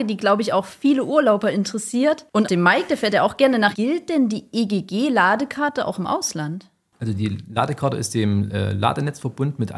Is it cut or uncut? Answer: cut